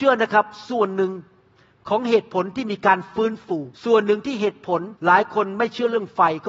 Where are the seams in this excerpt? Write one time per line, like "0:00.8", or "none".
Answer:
0:03.7
0:05.0